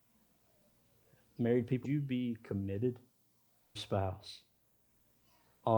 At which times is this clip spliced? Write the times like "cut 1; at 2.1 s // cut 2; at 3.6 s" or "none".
cut 1; at 1.8 s // cut 2; at 3.8 s